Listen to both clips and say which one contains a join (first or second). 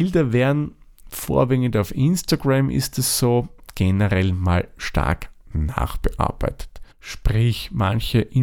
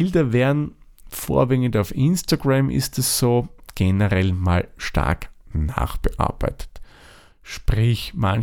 first